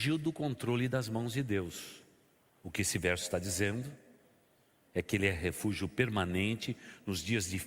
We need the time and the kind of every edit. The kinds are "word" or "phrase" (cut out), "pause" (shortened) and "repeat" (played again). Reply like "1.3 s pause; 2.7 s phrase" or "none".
none